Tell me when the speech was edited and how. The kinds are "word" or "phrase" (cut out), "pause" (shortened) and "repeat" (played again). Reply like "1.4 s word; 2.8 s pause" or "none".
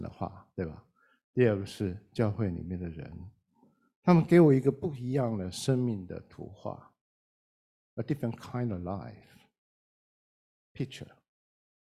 none

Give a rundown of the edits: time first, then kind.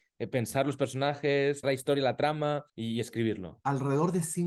1.6 s word; 2.7 s pause

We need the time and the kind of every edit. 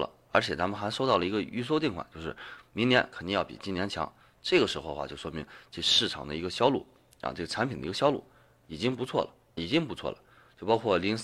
9.6 s word

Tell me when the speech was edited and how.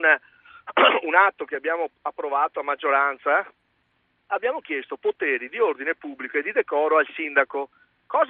none

